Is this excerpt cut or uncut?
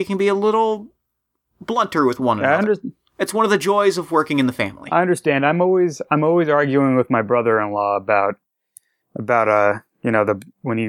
uncut